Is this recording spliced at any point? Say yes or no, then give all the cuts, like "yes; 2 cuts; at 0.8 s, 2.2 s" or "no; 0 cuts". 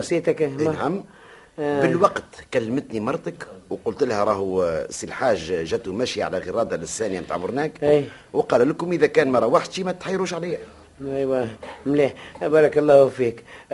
no; 0 cuts